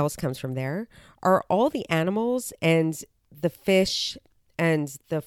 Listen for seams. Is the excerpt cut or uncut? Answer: uncut